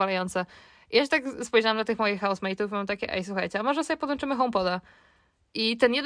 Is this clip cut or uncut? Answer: uncut